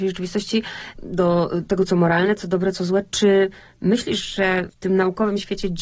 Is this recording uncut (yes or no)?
yes